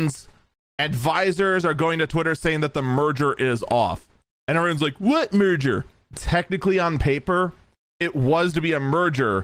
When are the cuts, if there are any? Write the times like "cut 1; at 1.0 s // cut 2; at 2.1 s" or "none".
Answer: none